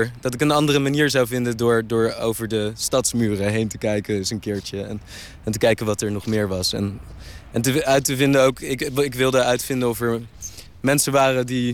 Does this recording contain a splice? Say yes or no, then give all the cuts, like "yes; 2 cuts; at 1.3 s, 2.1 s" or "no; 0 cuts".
no; 0 cuts